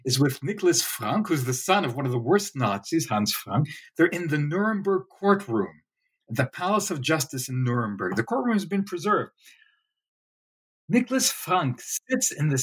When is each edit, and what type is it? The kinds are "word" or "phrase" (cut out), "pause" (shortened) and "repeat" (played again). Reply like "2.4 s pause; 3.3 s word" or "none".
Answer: none